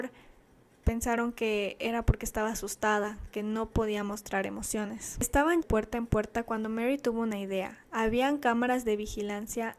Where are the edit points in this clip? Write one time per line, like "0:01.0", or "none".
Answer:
0:05.6